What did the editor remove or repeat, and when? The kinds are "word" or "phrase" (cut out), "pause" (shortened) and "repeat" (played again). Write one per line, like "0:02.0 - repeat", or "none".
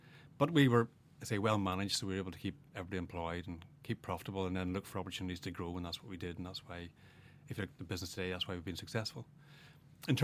none